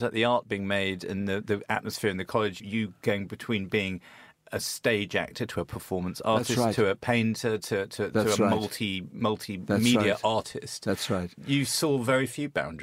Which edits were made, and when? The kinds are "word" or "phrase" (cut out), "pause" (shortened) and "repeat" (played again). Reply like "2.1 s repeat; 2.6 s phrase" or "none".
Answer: none